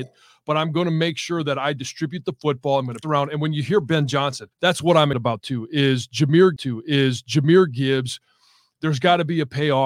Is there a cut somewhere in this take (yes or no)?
yes